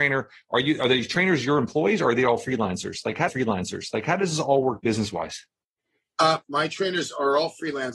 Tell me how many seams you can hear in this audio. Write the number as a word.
two